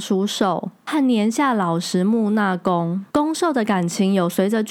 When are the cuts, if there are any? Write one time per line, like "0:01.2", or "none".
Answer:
0:03.1